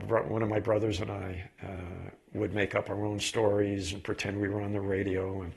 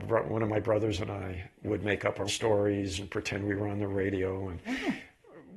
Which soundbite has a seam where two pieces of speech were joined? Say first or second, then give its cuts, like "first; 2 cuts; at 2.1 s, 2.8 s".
second; 2 cuts; at 1.5 s, 2.3 s